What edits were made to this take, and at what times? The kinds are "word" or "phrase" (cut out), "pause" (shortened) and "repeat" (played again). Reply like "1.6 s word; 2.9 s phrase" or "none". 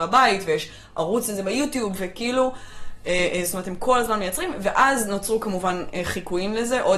none